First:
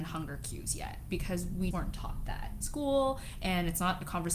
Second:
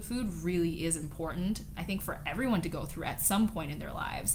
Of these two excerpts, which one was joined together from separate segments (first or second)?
first